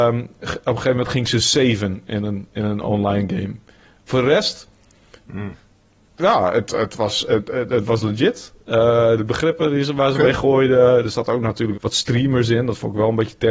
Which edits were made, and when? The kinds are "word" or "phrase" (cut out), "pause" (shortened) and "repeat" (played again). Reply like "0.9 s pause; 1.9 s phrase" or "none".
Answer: 11.7 s phrase